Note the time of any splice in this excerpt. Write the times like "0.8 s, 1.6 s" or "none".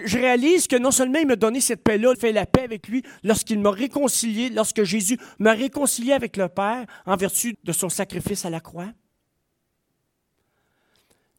2.1 s, 7.5 s